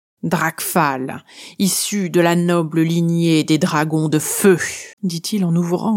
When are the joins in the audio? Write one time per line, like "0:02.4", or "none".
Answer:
0:04.9